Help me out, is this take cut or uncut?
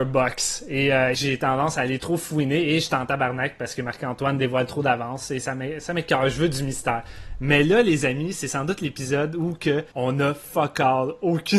cut